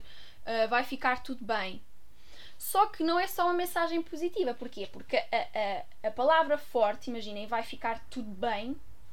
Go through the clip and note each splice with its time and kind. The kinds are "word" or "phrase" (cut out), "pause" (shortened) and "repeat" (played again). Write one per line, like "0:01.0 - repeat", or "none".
none

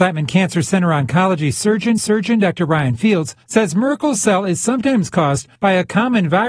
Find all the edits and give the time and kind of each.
0:02.0 - repeat
0:03.4 - pause
0:05.6 - pause

